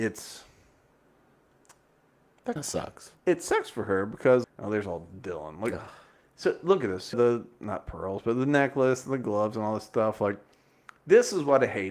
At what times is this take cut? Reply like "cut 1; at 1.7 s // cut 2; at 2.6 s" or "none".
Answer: cut 1; at 2.6 s // cut 2; at 4.4 s // cut 3; at 7.1 s